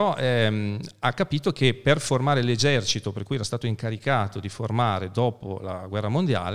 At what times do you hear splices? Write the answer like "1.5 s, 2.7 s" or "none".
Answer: none